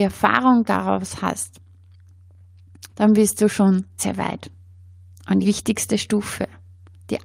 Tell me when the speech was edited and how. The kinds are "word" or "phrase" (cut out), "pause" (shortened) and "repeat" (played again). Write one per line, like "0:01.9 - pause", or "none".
0:02.9 - pause
0:04.0 - word
0:05.4 - phrase

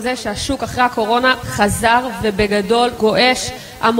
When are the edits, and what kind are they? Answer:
0:03.0 - word

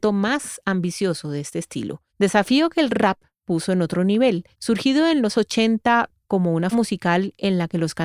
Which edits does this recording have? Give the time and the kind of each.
0:02.1 - pause
0:03.3 - pause
0:04.5 - pause
0:05.3 - word
0:06.7 - word

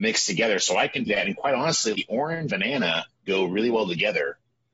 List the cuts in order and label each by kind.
0:01.1 - phrase
0:01.9 - word
0:02.5 - word
0:03.1 - pause

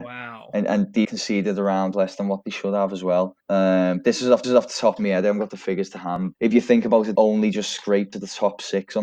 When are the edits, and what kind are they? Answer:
0:01.0 - word
0:01.9 - phrase
0:03.4 - pause
0:04.4 - repeat
0:06.3 - word
0:07.1 - word
0:08.1 - word

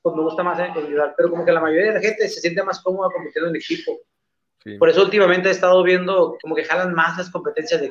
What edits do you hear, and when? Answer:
0:06.4 - word

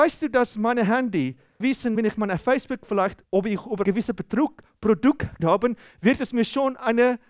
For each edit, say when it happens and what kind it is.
0:01.6 - word
0:02.0 - word
0:03.2 - word
0:03.8 - word
0:05.4 - word

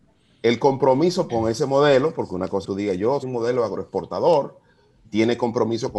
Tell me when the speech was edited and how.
0:01.3 - word
0:02.6 - word
0:03.2 - word
0:05.0 - word

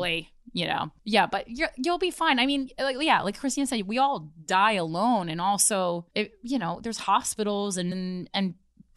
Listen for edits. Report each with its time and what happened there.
0:01.0 - pause
0:06.1 - pause
0:07.9 - word

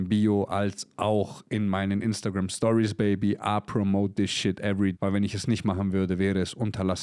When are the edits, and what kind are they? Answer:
0:04.9 - word

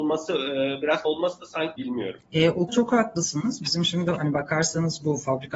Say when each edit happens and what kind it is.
0:01.1 - phrase
0:01.8 - phrase
0:02.2 - pause
0:02.7 - word

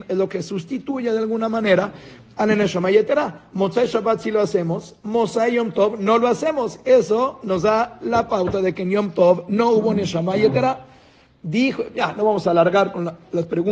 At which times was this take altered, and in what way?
none

